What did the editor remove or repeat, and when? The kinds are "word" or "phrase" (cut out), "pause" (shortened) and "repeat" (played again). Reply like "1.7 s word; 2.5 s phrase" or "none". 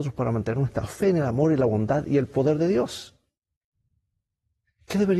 none

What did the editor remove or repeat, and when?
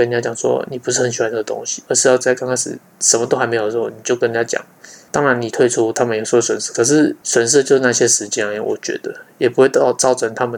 none

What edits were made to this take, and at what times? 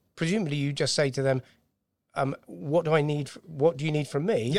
none

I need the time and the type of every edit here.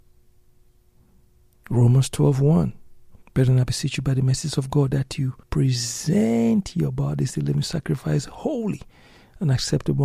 3.2 s pause; 5.4 s pause

